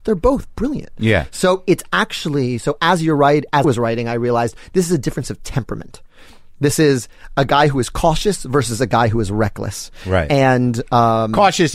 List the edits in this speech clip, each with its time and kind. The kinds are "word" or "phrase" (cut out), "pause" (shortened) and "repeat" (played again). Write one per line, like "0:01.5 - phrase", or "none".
0:03.6 - word